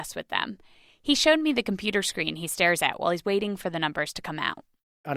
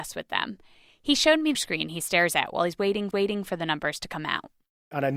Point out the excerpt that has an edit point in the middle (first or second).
second